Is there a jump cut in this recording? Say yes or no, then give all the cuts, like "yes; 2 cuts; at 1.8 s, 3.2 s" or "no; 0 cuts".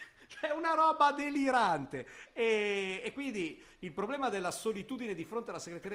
no; 0 cuts